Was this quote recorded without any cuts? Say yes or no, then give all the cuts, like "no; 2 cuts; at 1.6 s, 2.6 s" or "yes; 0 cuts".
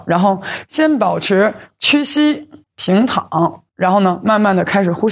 no; 2 cuts; at 2.6 s, 3.7 s